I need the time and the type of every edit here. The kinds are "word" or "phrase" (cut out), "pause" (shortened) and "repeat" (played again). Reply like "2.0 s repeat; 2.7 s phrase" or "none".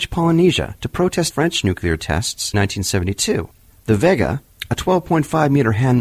1.3 s word; 2.5 s word; 3.7 s pause